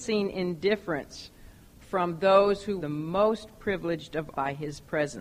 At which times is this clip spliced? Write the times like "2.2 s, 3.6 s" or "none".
2.8 s, 4.3 s